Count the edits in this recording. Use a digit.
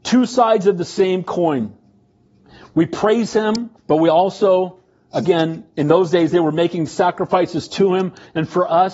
1